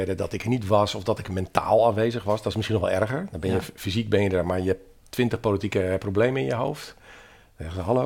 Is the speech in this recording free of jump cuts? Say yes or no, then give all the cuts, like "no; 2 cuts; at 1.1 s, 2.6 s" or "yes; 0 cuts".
yes; 0 cuts